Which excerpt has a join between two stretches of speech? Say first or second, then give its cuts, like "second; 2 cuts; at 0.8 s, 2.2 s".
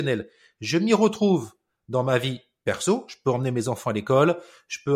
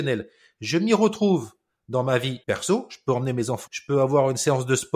second; 2 cuts; at 2.4 s, 3.7 s